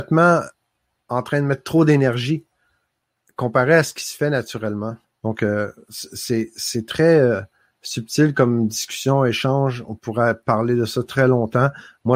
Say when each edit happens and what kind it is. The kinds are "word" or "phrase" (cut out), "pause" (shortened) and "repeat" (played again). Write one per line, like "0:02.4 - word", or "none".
0:05.0 - pause